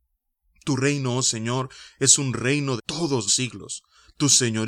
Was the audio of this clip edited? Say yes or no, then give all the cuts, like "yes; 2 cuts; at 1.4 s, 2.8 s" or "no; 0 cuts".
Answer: yes; 2 cuts; at 2.8 s, 3.3 s